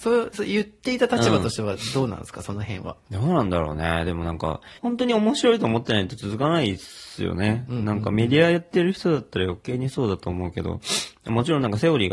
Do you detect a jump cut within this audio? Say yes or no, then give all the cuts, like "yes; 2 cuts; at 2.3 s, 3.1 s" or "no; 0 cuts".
yes; 1 cut; at 4.8 s